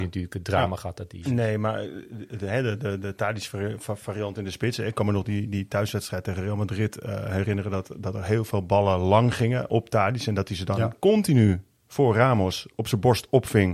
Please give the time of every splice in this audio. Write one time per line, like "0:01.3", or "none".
none